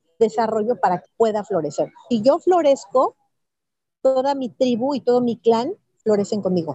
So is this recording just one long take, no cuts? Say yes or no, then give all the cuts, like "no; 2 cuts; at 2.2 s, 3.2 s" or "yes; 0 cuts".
no; 1 cut; at 1.0 s